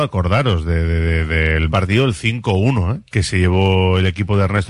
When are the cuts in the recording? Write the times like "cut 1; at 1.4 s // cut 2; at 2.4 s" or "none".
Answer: cut 1; at 1.7 s // cut 2; at 3.1 s

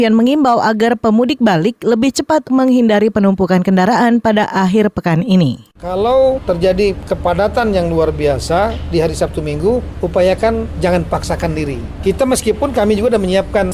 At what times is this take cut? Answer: cut 1; at 2.4 s

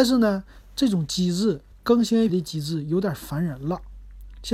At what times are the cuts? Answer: cut 1; at 1.7 s // cut 2; at 2.3 s

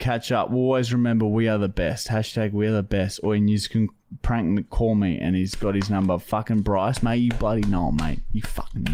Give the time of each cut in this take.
none

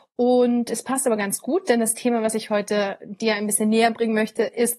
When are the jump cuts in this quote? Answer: none

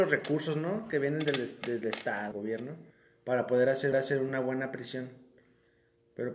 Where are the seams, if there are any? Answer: cut 1; at 2.3 s // cut 2; at 2.9 s // cut 3; at 3.9 s

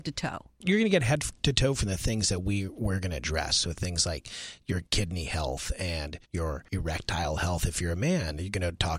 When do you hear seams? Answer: cut 1; at 6.2 s

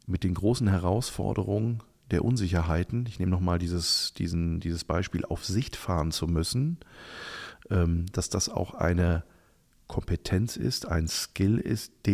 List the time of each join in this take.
none

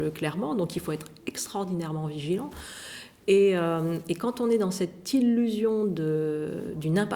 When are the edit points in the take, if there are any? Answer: none

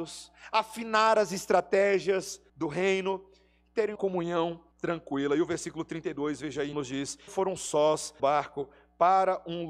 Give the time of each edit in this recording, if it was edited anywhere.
cut 1; at 2.5 s // cut 2; at 3.9 s // cut 3; at 4.7 s // cut 4; at 6.7 s // cut 5; at 7.3 s // cut 6; at 8.2 s

